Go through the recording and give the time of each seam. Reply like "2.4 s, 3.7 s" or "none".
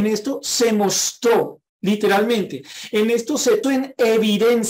1.7 s, 3.6 s